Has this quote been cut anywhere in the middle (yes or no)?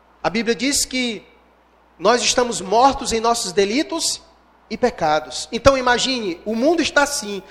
no